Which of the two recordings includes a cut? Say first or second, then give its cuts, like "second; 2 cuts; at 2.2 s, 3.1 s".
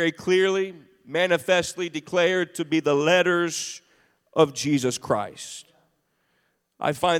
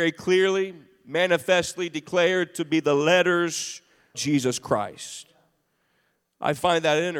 second; 1 cut; at 4.1 s